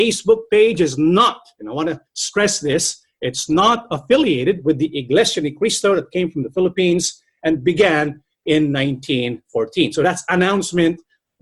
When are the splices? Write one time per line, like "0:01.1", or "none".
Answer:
0:02.1

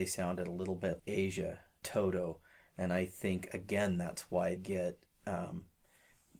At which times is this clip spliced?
0:01.0
0:01.8
0:04.6

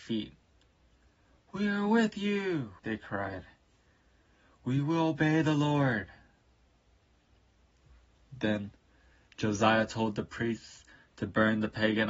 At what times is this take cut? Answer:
0:02.8

